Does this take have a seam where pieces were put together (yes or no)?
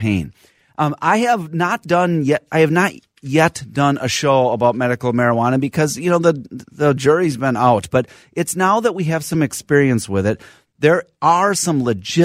no